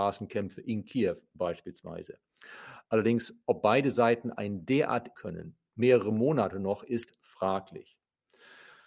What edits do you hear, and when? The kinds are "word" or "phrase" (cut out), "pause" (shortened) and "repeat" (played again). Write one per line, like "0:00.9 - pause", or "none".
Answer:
0:05.1 - phrase

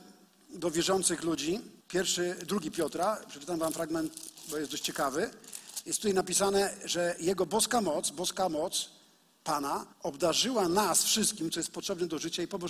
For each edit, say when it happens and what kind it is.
0:01.8 - pause
0:09.9 - pause

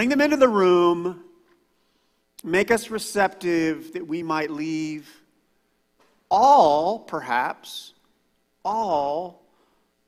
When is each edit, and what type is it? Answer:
none

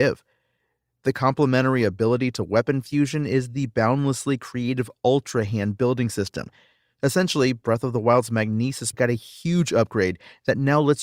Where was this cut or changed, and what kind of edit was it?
0:08.9 - word

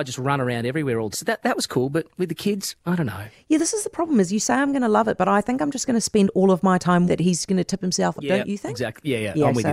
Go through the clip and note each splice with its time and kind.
0:01.1 - word
0:02.8 - word
0:07.1 - word
0:08.2 - word

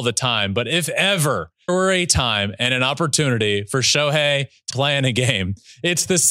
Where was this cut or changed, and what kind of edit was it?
0:01.7 - word
0:04.7 - word

